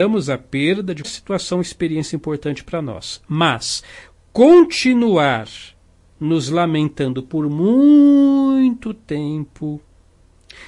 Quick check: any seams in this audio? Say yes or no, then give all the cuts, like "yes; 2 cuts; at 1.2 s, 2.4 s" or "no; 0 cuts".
yes; 1 cut; at 1.0 s